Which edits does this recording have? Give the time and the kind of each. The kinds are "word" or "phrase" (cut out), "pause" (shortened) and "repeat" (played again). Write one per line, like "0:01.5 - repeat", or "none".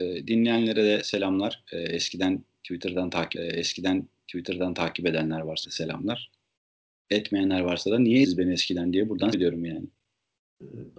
0:03.3 - repeat
0:05.6 - word
0:06.6 - pause
0:08.2 - word
0:09.3 - word